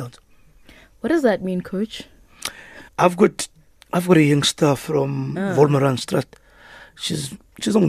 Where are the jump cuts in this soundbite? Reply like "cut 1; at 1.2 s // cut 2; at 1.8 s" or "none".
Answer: cut 1; at 2.9 s